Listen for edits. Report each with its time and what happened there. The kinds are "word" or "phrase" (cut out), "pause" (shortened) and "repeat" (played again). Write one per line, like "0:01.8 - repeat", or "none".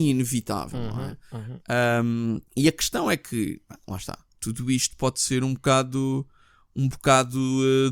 0:02.5 - pause